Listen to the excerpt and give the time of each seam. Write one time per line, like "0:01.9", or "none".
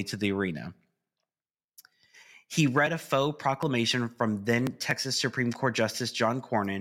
none